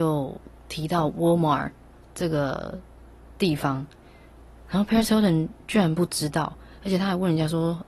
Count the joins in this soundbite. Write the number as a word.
zero